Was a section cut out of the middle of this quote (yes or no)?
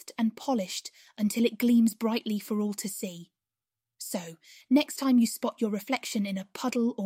no